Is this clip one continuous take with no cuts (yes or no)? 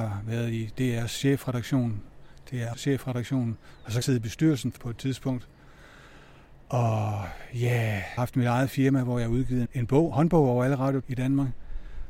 no